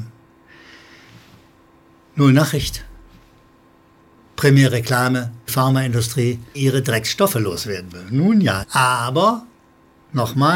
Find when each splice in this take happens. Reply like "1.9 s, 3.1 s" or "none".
5.5 s, 6.5 s, 8.6 s